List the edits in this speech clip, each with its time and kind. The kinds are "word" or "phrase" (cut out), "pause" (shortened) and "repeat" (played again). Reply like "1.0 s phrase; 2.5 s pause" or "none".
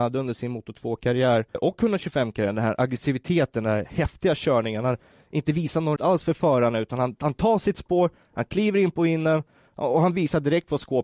1.5 s word; 6.0 s word